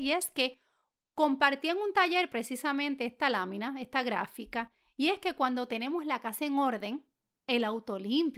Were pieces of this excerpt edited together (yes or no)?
no